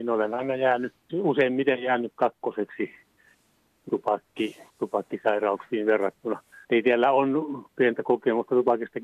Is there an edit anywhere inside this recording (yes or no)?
yes